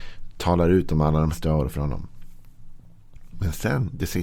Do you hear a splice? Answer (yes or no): yes